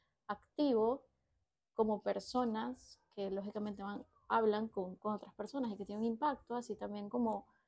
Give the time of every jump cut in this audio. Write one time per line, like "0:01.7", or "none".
0:05.0